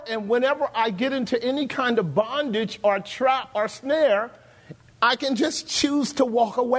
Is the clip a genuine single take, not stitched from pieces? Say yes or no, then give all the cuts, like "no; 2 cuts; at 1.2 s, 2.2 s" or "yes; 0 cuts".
yes; 0 cuts